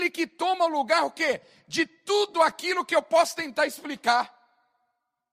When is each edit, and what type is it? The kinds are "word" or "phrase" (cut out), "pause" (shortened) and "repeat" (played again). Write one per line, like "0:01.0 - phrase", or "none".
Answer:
none